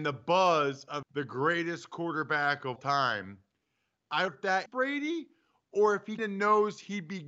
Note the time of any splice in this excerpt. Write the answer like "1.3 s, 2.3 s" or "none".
1.0 s, 2.8 s, 4.3 s, 4.7 s, 6.2 s